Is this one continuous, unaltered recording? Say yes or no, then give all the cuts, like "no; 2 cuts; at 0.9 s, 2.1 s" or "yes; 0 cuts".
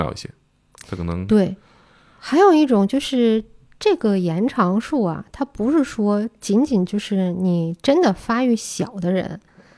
yes; 0 cuts